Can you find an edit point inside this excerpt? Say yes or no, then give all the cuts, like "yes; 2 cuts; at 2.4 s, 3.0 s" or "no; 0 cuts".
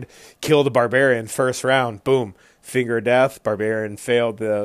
no; 0 cuts